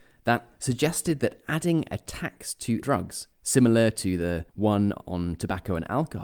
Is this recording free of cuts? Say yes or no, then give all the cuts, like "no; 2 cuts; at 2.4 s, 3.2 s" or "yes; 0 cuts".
no; 3 cuts; at 2.8 s, 3.3 s, 4.5 s